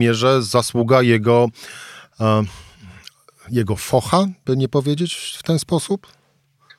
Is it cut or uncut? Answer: uncut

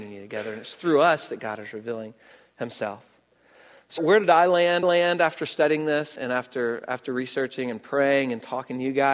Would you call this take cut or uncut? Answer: cut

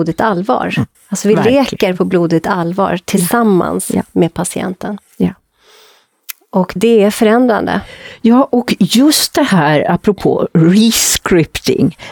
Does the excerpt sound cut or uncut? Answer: cut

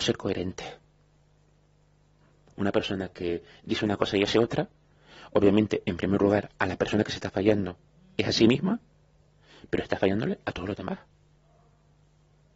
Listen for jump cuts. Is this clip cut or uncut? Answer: uncut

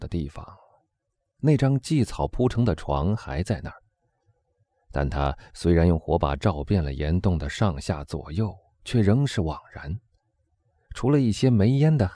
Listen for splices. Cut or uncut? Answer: uncut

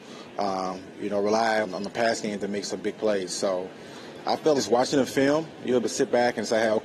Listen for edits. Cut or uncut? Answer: cut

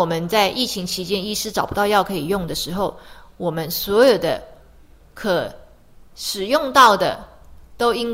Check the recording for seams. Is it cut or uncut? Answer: uncut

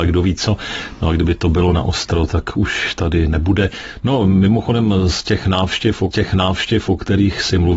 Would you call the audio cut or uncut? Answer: cut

